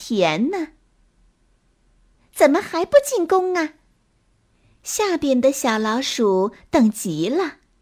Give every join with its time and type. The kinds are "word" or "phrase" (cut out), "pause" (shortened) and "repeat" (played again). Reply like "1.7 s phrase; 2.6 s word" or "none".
none